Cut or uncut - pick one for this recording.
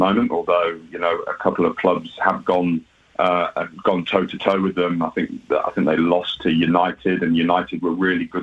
uncut